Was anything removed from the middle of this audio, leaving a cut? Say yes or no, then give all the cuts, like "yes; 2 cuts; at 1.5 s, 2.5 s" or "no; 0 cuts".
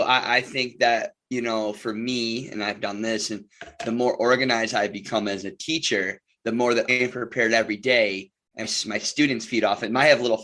yes; 2 cuts; at 6.9 s, 8.6 s